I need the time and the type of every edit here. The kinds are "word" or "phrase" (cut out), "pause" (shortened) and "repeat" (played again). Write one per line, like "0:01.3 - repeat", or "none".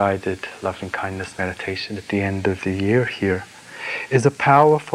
none

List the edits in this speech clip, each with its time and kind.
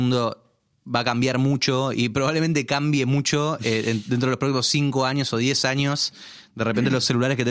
none

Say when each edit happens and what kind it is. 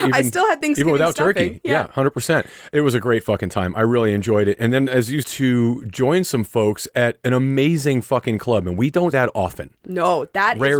0:05.2 - phrase
0:09.1 - word

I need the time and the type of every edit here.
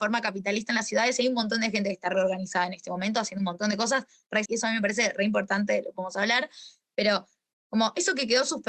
0:04.5 - word

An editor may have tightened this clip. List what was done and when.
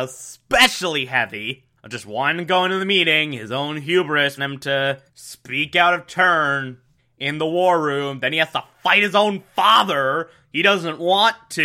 0:01.8 - pause
0:04.4 - word
0:05.1 - pause
0:07.0 - pause

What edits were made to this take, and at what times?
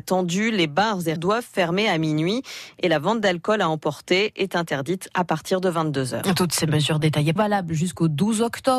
0:01.2 - word
0:07.4 - phrase

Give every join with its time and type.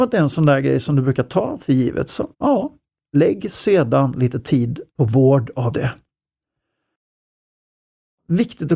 0:02.3 - pause
0:04.9 - pause
0:05.7 - word

